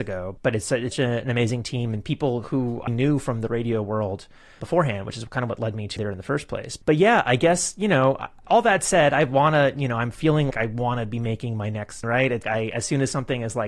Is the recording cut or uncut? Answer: cut